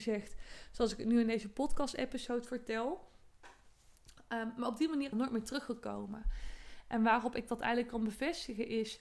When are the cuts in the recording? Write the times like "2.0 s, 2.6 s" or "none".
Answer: 5.1 s